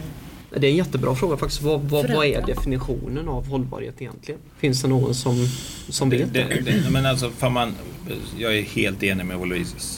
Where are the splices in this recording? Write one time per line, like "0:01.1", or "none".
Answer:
0:04.5